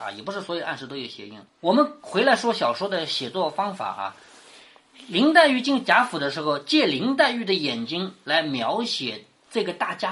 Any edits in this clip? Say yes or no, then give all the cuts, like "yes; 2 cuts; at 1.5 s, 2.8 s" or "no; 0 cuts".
yes; 1 cut; at 1.5 s